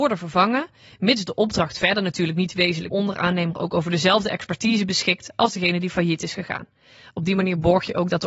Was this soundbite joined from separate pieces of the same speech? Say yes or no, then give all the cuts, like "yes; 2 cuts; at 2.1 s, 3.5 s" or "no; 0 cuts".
yes; 1 cut; at 2.9 s